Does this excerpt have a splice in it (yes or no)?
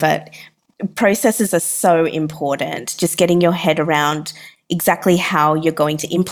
no